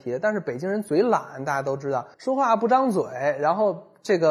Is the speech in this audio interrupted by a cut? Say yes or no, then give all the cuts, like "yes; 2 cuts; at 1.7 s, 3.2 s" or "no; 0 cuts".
yes; 1 cut; at 2.1 s